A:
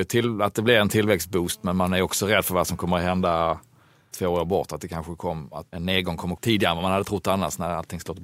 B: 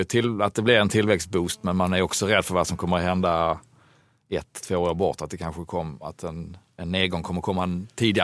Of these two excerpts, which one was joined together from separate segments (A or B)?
A